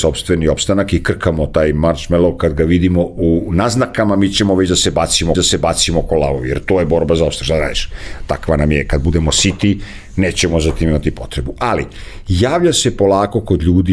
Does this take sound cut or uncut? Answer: cut